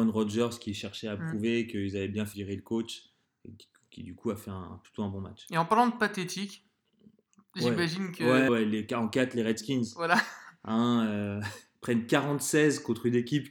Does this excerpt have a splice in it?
yes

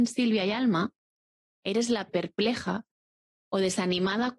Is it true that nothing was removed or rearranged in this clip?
no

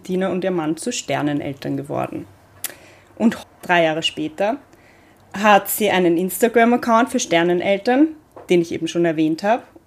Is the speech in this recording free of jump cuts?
no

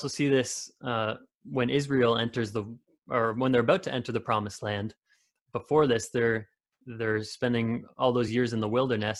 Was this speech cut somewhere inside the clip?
no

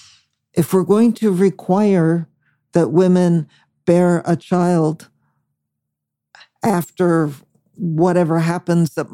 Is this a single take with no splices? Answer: yes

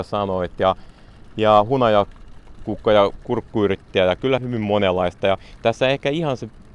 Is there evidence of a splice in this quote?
yes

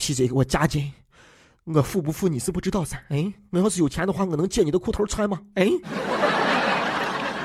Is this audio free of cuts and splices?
yes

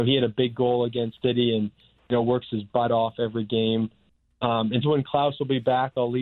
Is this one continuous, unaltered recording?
no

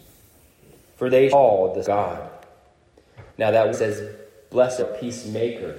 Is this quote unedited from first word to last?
no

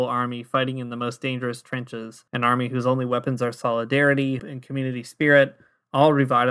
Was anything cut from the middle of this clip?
yes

